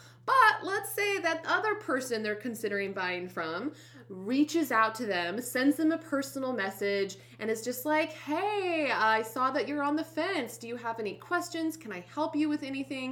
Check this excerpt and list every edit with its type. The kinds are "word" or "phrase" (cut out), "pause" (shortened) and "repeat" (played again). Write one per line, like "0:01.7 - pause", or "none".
0:01.4 - word

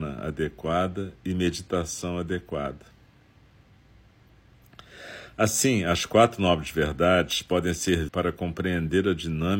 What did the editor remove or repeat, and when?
0:08.1 - phrase

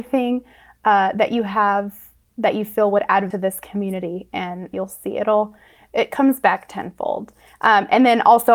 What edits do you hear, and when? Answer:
0:03.3 - phrase
0:04.7 - word

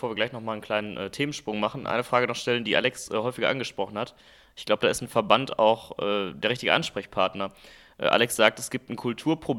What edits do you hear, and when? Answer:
none

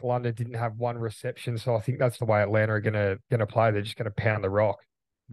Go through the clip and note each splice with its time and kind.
0:02.2 - word
0:03.2 - pause

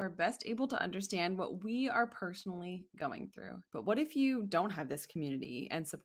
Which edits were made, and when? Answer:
0:03.7 - pause

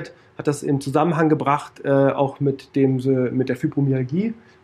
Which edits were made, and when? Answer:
none

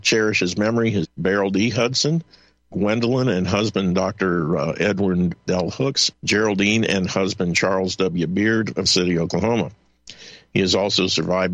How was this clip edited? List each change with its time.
0:01.0 - word
0:05.5 - word
0:06.1 - word
0:08.8 - word

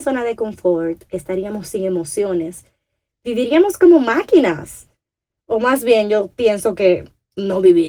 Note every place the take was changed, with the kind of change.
none

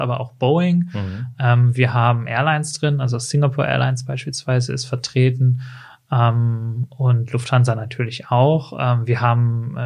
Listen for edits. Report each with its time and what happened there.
none

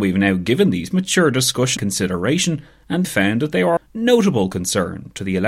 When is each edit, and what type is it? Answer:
0:00.9 - word
0:01.8 - word
0:03.0 - word
0:03.8 - word

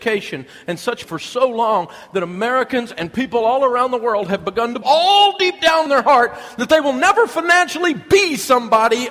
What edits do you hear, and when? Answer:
0:01.0 - word
0:04.8 - word
0:05.9 - word

